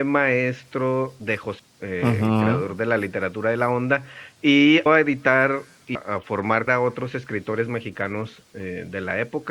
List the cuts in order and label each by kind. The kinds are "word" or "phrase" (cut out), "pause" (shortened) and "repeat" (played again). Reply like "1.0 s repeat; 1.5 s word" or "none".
1.6 s word; 4.9 s word; 5.9 s word; 6.7 s word